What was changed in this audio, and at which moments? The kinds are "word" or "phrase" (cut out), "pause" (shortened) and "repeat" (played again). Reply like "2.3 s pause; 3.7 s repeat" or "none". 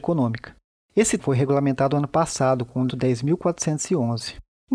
1.2 s word; 2.9 s word